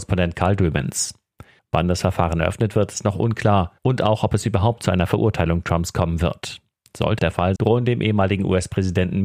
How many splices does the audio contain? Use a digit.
4